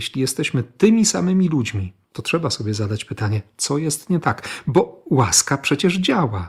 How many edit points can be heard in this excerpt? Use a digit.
1